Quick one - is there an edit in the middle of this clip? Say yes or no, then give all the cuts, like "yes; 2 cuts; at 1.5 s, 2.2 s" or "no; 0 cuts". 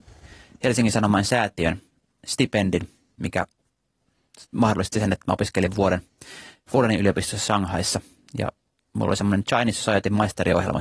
no; 0 cuts